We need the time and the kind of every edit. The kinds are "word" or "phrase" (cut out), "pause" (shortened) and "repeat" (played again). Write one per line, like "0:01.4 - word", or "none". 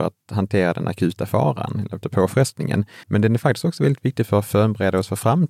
0:02.0 - word
0:03.0 - pause